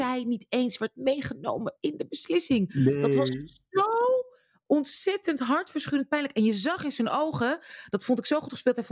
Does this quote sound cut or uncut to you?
uncut